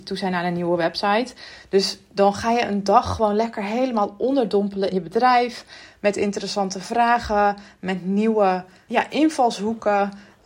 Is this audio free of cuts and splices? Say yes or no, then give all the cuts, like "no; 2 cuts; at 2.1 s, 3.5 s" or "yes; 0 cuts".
no; 2 cuts; at 4.9 s, 8.9 s